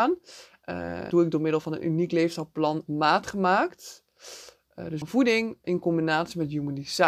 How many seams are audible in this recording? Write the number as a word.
four